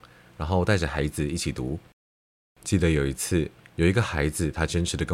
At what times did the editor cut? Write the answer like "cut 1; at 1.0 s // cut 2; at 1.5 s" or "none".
none